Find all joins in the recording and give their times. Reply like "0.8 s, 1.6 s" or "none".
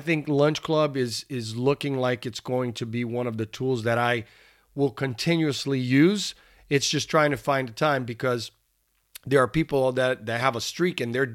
none